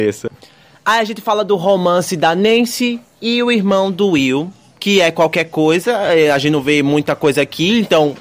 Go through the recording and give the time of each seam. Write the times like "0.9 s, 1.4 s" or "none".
none